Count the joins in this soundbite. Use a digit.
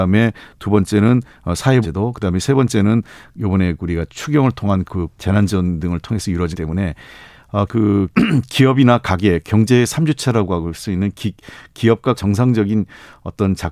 9